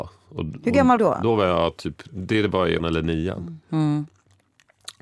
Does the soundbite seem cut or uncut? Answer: cut